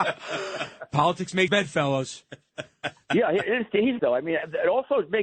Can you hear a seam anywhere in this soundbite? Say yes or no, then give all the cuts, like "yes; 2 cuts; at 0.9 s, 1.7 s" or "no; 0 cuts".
yes; 2 cuts; at 1.5 s, 4.0 s